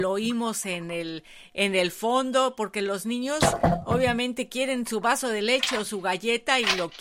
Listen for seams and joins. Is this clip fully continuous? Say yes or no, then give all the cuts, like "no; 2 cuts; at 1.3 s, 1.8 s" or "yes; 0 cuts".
yes; 0 cuts